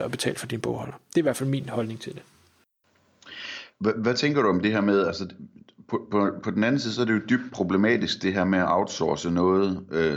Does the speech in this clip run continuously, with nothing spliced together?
yes; 0 cuts

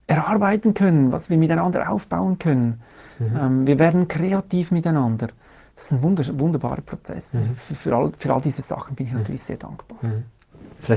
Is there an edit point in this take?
no; 0 cuts

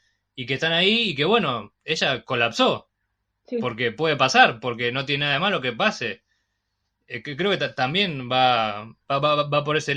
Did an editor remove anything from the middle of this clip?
no; 0 cuts

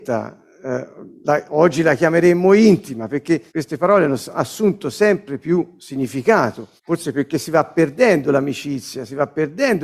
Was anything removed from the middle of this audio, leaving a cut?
yes; 2 cuts; at 3.5 s, 6.8 s

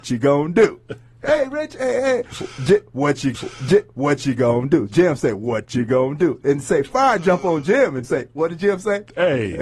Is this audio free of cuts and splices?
no; 2 cuts; at 3.3 s, 8.0 s

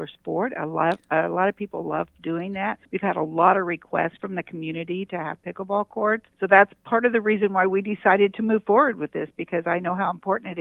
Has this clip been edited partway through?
yes; 2 cuts; at 2.9 s, 6.3 s

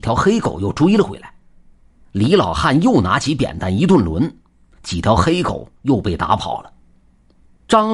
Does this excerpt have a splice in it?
no; 0 cuts

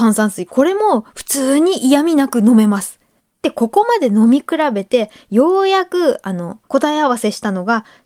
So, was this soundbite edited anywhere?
yes; 2 cuts; at 3.2 s, 6.7 s

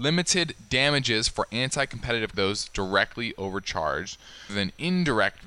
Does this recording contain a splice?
yes; 2 cuts; at 2.3 s, 4.5 s

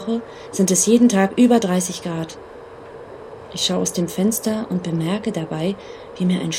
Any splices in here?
no; 0 cuts

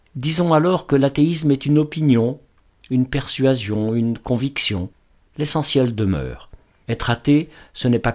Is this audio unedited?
yes; 0 cuts

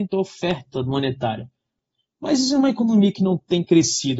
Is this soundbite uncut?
yes; 0 cuts

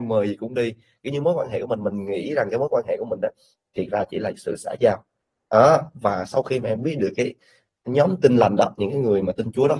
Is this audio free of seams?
yes; 0 cuts

